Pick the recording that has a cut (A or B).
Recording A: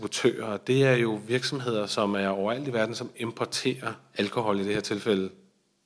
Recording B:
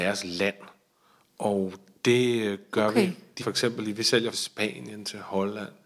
B